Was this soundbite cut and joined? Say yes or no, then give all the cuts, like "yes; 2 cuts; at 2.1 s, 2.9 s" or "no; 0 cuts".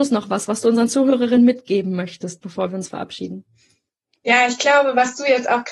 no; 0 cuts